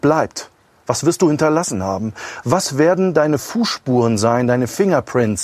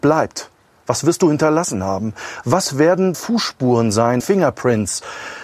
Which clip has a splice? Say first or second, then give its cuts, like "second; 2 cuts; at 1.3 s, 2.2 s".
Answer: second; 2 cuts; at 3.1 s, 4.2 s